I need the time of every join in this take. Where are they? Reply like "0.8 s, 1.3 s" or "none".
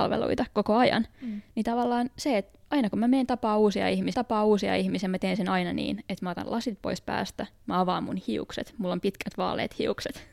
4.1 s